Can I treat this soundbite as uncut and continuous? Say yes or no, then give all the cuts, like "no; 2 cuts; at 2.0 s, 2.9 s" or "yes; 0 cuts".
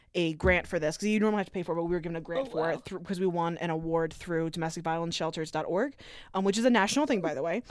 yes; 0 cuts